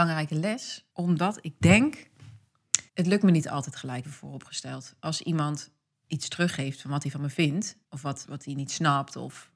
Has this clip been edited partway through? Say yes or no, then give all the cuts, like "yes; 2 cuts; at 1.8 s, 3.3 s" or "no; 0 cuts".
yes; 6 cuts; at 0.9 s, 2.9 s, 4.0 s, 5.9 s, 7.8 s, 8.2 s